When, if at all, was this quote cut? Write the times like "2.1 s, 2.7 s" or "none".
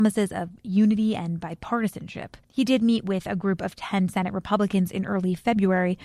2.4 s